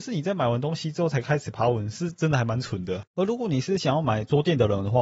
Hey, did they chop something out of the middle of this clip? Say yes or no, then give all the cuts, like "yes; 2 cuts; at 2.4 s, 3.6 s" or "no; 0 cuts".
yes; 1 cut; at 3.1 s